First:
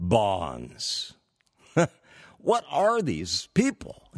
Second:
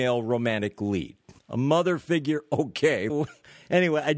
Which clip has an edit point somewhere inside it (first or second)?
second